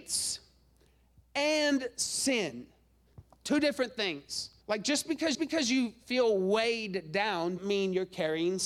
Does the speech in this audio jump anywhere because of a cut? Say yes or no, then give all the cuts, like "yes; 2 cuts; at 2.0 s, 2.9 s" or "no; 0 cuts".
yes; 3 cuts; at 4.6 s, 5.3 s, 7.6 s